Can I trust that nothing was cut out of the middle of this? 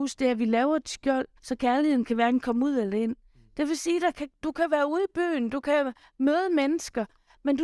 no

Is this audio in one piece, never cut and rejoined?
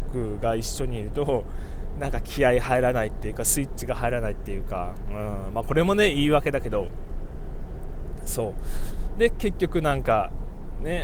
yes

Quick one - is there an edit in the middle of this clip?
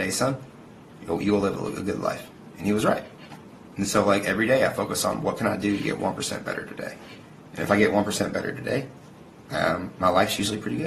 no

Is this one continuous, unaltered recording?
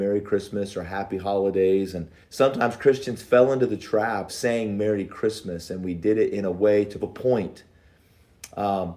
no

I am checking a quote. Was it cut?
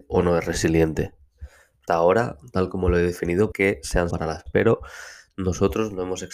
yes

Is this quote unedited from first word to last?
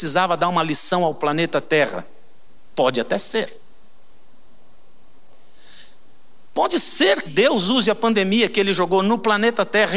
no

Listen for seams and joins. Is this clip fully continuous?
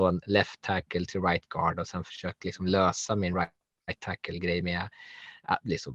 yes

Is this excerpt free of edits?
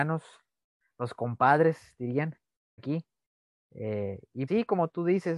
no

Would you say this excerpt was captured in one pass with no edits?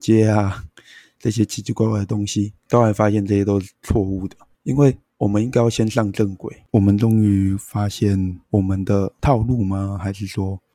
no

